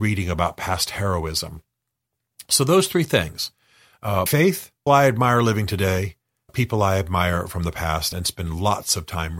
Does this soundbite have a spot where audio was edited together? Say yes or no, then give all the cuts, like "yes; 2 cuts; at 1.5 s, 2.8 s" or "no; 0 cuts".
yes; 4 cuts; at 4.3 s, 4.9 s, 6.5 s, 8.1 s